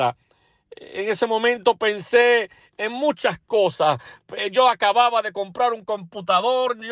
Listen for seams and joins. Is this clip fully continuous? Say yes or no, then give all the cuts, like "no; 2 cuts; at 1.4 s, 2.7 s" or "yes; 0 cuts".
yes; 0 cuts